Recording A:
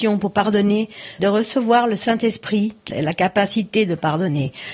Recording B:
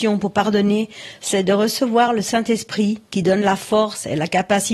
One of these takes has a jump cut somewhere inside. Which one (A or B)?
A